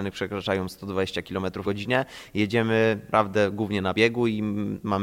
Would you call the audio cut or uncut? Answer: cut